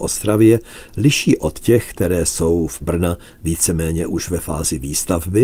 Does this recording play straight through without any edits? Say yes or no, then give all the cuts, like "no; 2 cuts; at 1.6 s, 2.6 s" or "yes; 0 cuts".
no; 1 cut; at 2.8 s